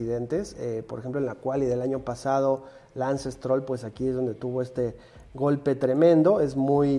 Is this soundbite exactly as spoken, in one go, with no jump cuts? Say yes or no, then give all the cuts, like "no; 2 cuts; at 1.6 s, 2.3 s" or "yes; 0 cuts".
yes; 0 cuts